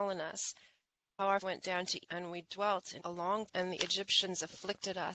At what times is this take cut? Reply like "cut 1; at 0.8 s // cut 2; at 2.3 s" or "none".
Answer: cut 1; at 1.4 s // cut 2; at 2.0 s // cut 3; at 3.0 s // cut 4; at 3.5 s